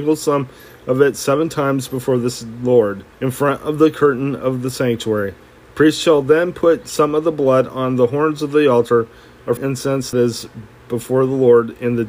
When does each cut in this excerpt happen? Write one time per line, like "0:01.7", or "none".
0:03.1
0:09.6
0:10.1

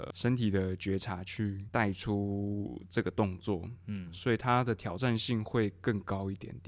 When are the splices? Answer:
none

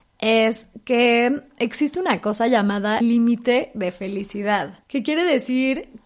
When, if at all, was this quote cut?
0:03.0
0:04.8

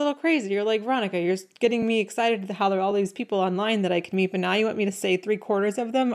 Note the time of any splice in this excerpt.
none

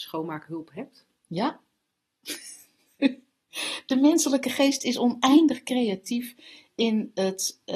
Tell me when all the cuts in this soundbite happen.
none

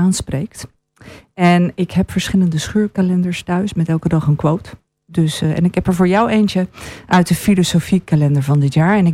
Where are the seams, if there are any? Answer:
none

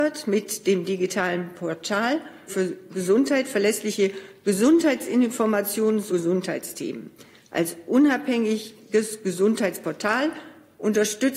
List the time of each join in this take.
0:02.5
0:06.1

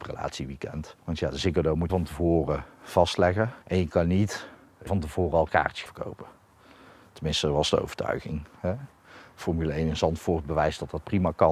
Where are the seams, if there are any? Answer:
0:01.0
0:01.9
0:03.6
0:04.9
0:05.9

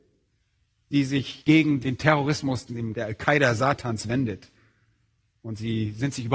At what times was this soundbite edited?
0:02.7

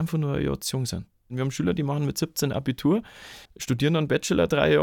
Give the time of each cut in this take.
0:03.5

